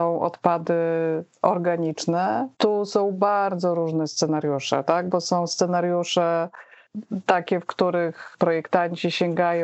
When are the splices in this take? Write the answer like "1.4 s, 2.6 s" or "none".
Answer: 2.5 s